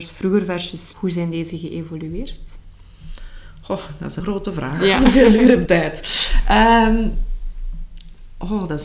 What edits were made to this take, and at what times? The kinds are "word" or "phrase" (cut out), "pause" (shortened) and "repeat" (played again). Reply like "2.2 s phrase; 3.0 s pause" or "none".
0.9 s word; 4.2 s word; 5.7 s word